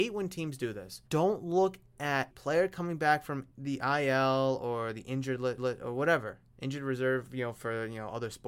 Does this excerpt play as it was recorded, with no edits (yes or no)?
no